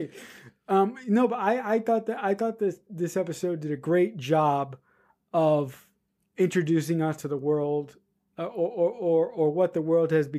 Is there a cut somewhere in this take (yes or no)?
no